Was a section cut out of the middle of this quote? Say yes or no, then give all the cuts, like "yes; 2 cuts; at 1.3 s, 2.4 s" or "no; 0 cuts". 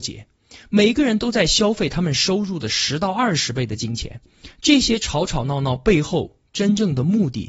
no; 0 cuts